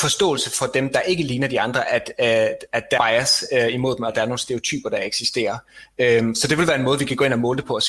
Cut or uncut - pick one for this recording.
cut